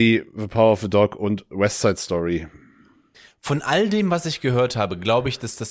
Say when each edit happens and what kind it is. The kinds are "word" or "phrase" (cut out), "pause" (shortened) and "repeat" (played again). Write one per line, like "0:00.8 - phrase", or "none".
none